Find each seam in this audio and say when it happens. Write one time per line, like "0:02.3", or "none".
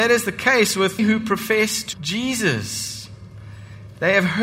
0:01.0
0:01.9

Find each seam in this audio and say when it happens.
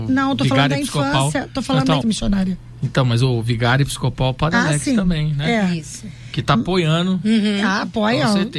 0:02.0

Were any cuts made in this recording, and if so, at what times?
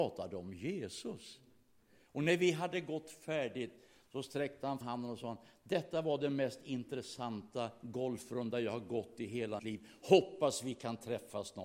0:04.8
0:09.6

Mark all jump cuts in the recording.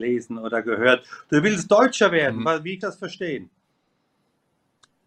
0:02.8

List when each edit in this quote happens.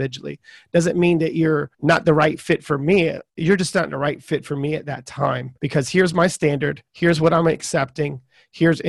0:01.7
0:03.3
0:05.6
0:06.9

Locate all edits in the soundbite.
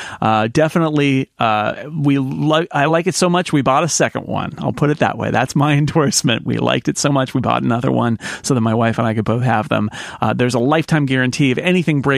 none

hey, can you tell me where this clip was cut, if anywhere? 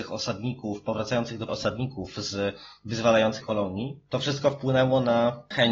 0:01.5
0:03.4

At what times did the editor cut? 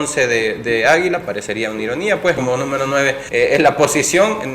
0:02.4
0:03.3

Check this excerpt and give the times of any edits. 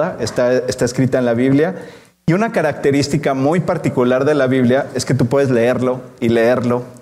none

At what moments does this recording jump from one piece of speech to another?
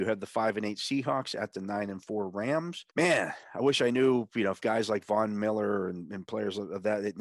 0:02.9

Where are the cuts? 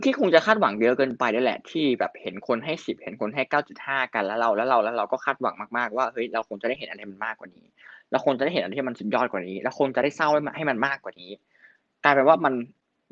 none

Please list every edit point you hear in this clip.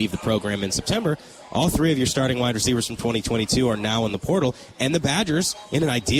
none

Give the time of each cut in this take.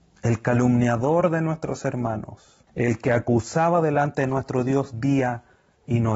0:02.7

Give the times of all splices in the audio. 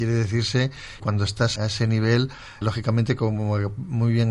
0:01.0
0:01.6
0:02.6

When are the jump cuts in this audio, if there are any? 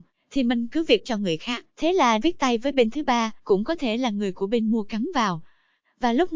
0:01.0
0:01.7
0:02.2
0:03.4

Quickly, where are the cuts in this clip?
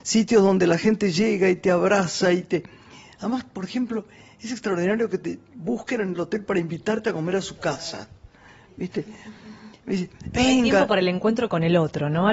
none

